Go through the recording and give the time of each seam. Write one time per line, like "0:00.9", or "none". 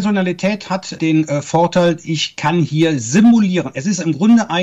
0:00.9